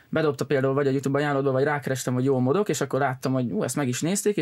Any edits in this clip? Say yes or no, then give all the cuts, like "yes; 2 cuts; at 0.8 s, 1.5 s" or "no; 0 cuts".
no; 0 cuts